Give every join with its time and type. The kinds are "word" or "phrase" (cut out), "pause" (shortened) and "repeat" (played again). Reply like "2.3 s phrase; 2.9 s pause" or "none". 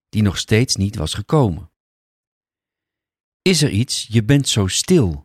none